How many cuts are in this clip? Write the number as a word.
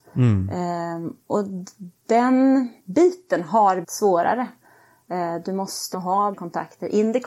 four